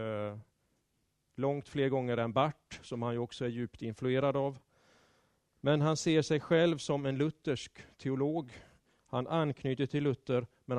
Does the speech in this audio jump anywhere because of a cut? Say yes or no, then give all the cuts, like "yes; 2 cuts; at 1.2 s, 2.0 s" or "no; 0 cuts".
no; 0 cuts